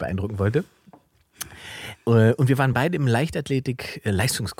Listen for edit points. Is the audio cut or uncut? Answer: uncut